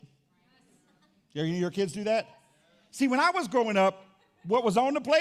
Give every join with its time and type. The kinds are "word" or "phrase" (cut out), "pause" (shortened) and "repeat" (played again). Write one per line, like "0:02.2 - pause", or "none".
none